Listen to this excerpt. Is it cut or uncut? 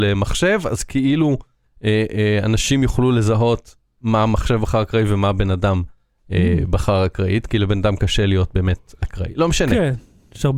uncut